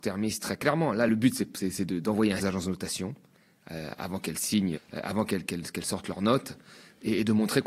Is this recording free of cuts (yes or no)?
no